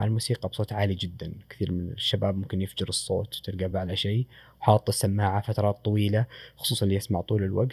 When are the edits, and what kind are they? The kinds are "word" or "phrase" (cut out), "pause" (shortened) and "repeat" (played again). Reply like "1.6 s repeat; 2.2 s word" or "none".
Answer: none